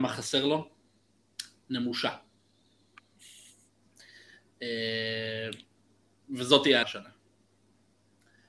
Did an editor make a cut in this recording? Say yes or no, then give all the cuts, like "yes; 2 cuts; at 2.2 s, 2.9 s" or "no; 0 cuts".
yes; 1 cut; at 6.8 s